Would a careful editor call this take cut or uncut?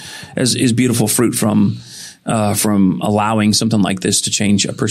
uncut